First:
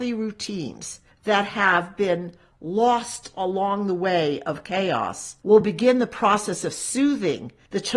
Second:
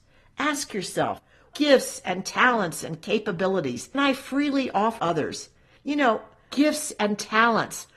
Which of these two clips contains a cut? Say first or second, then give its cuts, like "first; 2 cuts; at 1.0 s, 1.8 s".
second; 4 cuts; at 1.5 s, 3.9 s, 5.0 s, 6.5 s